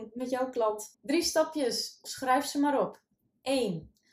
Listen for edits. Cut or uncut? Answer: cut